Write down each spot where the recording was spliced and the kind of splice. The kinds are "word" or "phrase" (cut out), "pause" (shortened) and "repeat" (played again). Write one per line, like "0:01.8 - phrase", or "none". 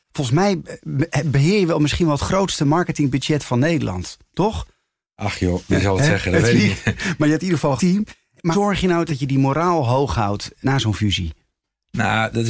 0:07.8 - word
0:08.5 - word